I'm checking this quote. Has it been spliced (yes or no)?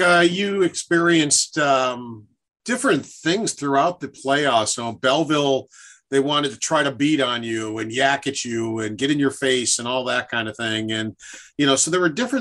no